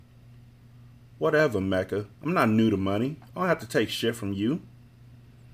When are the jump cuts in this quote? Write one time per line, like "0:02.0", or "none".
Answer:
0:02.1

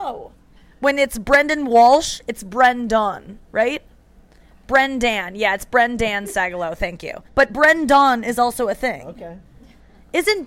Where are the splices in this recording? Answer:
0:03.4
0:07.3

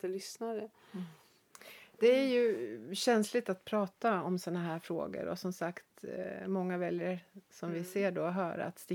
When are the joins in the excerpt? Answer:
none

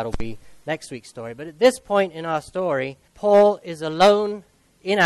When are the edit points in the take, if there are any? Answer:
0:03.1

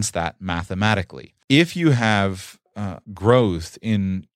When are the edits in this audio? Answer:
0:01.4
0:03.0

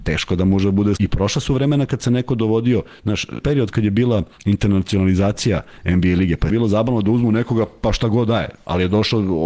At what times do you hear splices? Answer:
0:01.0
0:03.4
0:04.3
0:06.5

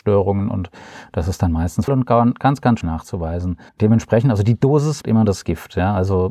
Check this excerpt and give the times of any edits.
0:01.9
0:02.8
0:03.7
0:05.0

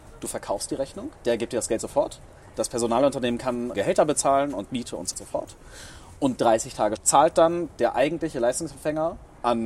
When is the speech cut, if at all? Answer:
0:01.2
0:03.7
0:05.1
0:07.0

